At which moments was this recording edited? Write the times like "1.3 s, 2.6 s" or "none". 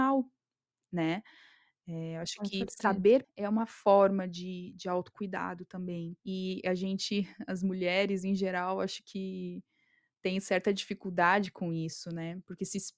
3.2 s, 6.2 s